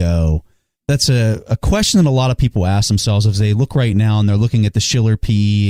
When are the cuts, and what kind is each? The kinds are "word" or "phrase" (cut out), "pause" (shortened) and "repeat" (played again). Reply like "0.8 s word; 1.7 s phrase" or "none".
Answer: none